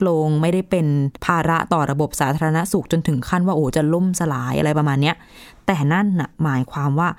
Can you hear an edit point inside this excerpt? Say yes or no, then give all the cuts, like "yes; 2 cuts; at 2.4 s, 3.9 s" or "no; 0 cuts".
yes; 1 cut; at 1.2 s